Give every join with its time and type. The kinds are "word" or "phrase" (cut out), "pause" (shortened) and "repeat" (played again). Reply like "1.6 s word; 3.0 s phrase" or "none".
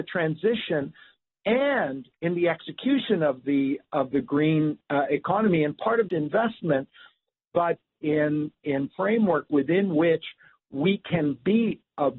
2.1 s pause; 6.1 s phrase; 8.9 s phrase